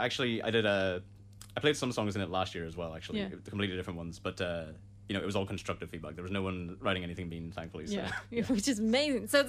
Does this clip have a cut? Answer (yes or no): no